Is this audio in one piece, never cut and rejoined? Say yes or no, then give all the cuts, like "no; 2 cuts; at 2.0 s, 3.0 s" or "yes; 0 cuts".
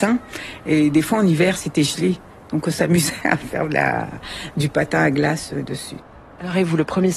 yes; 0 cuts